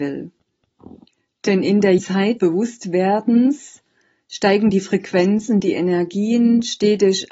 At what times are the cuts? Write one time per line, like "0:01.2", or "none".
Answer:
0:02.0
0:02.4